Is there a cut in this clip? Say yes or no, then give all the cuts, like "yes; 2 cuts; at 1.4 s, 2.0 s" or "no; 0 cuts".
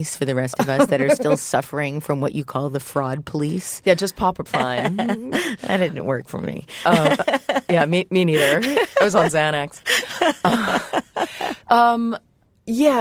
yes; 1 cut; at 4.5 s